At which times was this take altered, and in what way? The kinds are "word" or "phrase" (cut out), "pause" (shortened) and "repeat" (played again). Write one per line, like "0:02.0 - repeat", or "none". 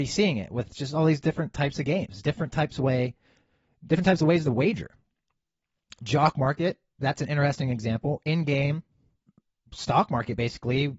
none